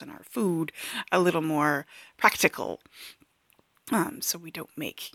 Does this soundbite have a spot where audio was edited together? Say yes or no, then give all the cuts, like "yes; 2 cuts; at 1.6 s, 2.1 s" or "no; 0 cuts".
no; 0 cuts